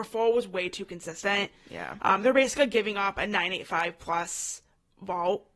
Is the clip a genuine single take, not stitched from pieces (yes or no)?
yes